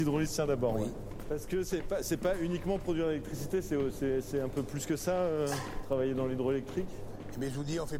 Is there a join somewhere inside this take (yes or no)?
no